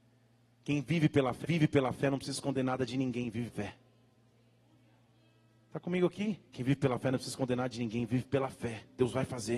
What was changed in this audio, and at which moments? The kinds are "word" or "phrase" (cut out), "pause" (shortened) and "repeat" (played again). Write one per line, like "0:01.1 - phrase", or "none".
0:01.4 - repeat
0:03.5 - word
0:06.5 - pause